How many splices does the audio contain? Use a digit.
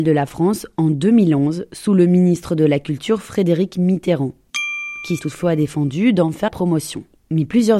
2